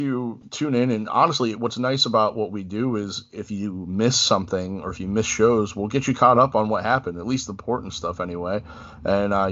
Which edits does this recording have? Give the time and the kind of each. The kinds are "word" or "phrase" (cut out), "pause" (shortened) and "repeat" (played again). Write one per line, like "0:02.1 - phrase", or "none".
none